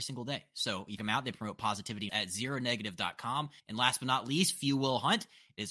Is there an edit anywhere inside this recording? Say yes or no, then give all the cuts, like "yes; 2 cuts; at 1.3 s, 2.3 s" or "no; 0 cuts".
yes; 3 cuts; at 1.0 s, 2.1 s, 3.6 s